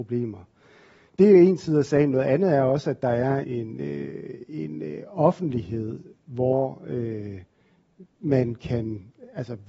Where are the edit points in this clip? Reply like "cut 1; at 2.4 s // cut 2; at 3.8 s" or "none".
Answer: cut 1; at 3.4 s // cut 2; at 8.1 s